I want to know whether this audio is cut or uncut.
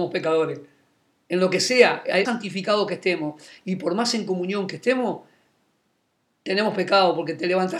cut